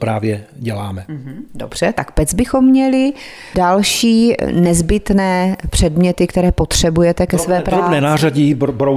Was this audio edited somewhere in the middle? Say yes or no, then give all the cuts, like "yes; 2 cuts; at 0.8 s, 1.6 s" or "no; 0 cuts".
no; 0 cuts